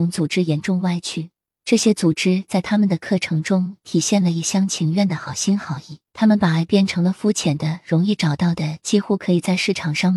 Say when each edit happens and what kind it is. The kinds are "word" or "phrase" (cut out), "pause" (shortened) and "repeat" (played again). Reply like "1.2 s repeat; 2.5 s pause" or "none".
1.5 s pause; 6.1 s pause